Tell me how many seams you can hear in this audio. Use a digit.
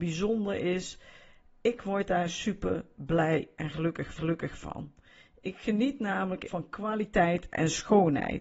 2